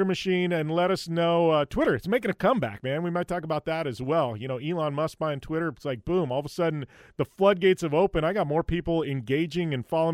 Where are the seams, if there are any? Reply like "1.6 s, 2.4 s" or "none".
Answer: none